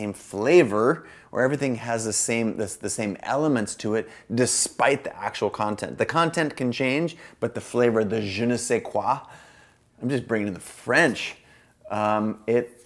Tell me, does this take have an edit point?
no; 0 cuts

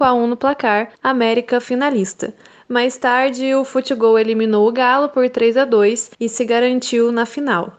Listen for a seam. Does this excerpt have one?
yes; 2 cuts; at 0.9 s, 6.1 s

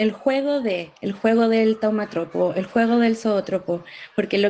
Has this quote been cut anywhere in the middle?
yes; 1 cut; at 1.0 s

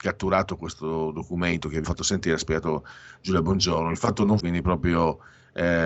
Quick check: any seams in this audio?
yes; 2 cuts; at 1.8 s, 4.4 s

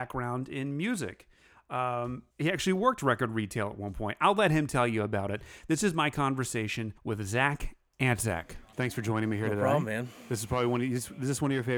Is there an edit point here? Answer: yes; 3 cuts; at 2.3 s, 7.0 s, 8.7 s

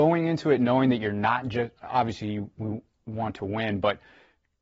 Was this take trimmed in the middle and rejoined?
no; 0 cuts

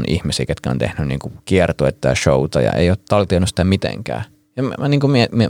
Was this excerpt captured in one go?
yes; 0 cuts

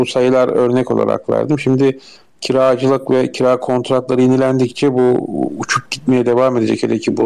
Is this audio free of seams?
yes; 0 cuts

